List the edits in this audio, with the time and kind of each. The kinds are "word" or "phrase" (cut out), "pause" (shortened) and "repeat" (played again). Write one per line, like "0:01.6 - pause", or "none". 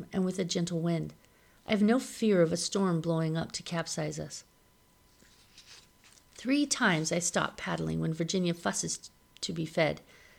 none

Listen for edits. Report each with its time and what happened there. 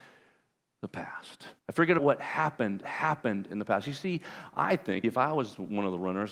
0:01.6 - pause
0:02.0 - word
0:02.8 - repeat
0:05.0 - word

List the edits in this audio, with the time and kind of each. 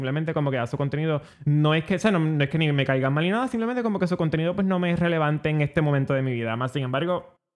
0:01.3 - pause

